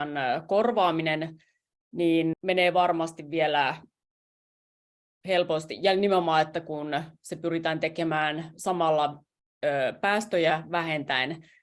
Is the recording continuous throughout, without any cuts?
no; 1 cut; at 2.3 s

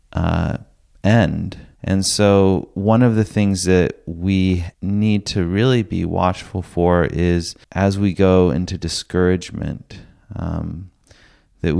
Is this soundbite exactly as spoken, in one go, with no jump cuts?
no; 3 cuts; at 1.7 s, 4.7 s, 7.6 s

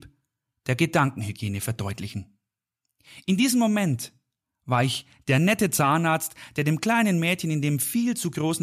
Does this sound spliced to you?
no; 0 cuts

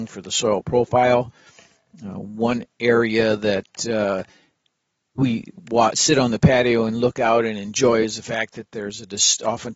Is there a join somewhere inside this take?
no; 0 cuts

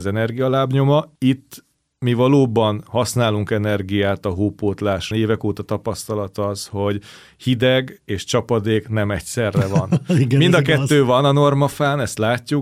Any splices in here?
yes; 2 cuts; at 1.1 s, 5.1 s

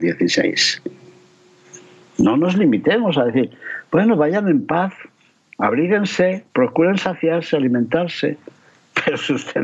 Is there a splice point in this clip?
yes; 1 cut; at 6.5 s

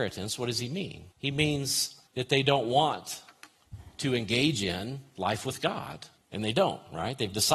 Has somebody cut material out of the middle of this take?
yes; 3 cuts; at 1.1 s, 2.1 s, 6.2 s

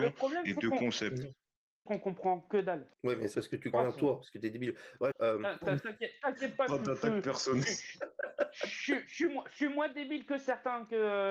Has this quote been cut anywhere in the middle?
yes; 5 cuts; at 1.9 s, 2.9 s, 3.3 s, 3.7 s, 5.1 s

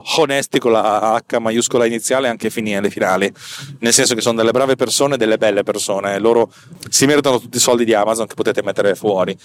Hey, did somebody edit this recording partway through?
no; 0 cuts

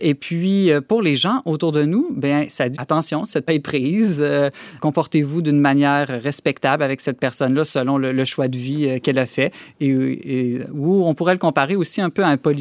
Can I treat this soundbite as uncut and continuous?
no; 3 cuts; at 2.8 s, 3.5 s, 4.8 s

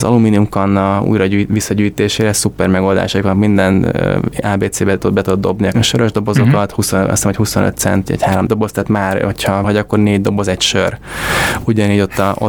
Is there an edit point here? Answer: yes; 4 cuts; at 5.7 s, 8.1 s, 8.5 s, 9.6 s

